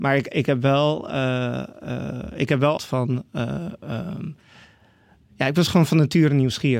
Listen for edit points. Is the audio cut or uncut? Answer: cut